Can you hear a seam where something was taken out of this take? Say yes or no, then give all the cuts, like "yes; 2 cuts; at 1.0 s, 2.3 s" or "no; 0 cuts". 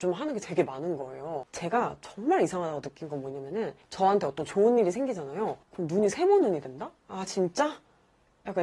yes; 3 cuts; at 3.8 s, 5.6 s, 7.0 s